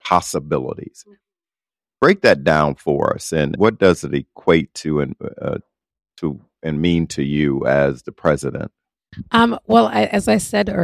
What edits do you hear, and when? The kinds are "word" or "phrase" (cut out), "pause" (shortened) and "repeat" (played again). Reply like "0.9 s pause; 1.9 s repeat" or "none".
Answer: 3.5 s word